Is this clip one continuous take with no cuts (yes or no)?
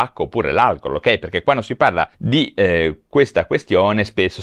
no